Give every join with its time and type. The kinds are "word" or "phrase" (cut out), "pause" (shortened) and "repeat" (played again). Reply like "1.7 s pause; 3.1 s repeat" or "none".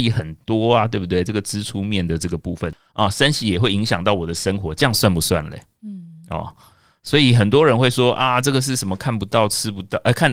5.8 s pause

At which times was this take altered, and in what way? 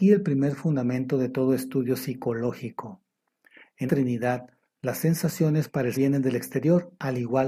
3.9 s word; 5.9 s word

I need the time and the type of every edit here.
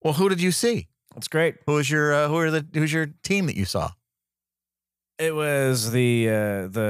none

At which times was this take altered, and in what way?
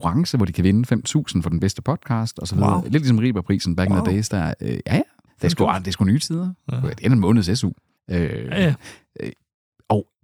none

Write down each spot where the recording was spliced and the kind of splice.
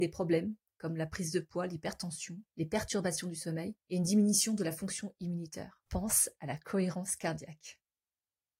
2.5 s pause; 3.8 s pause; 5.9 s pause

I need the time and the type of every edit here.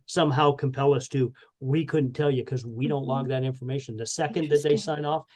none

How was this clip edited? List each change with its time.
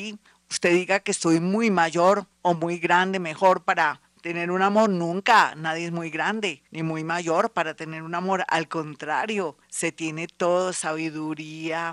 2.3 s pause; 6.7 s pause; 9.6 s pause

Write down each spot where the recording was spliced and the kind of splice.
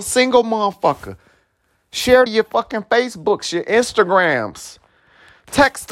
2.3 s phrase

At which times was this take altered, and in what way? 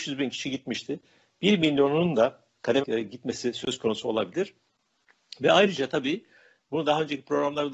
2.8 s word

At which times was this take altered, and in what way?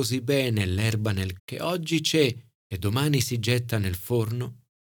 1.4 s word

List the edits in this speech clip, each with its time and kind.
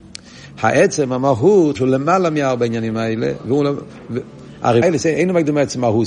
1.8 s phrase; 4.8 s phrase

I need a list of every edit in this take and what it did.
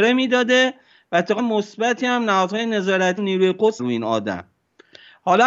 1.4 s word; 3.2 s word; 3.8 s word

